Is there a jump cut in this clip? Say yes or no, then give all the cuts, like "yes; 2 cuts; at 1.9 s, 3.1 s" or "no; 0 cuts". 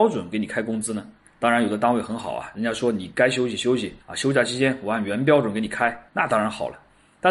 yes; 3 cuts; at 1.2 s, 4.0 s, 6.1 s